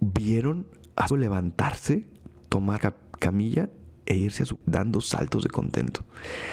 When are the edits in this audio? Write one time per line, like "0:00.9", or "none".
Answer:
0:01.1
0:02.8
0:04.6

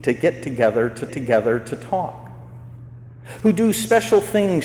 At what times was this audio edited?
0:01.1

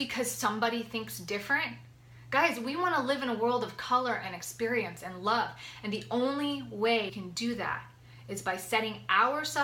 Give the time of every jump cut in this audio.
0:07.1

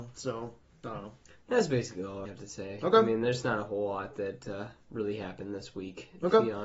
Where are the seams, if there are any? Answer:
0:02.3

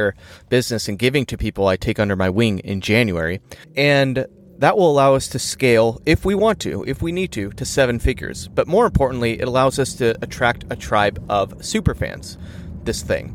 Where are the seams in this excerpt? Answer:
0:03.6

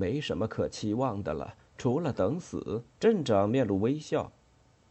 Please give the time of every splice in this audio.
0:02.9

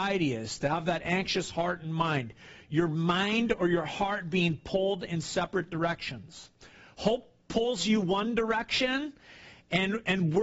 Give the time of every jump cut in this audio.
none

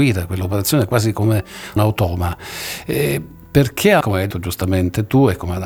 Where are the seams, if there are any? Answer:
0:01.8
0:04.0
0:04.3

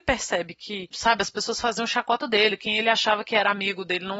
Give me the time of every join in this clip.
none

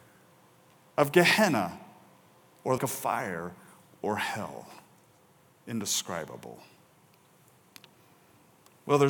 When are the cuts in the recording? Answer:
0:02.8

